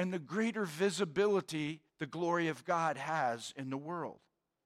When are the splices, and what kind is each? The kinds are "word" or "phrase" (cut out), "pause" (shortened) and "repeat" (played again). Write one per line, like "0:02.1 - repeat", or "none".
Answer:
0:01.9 - pause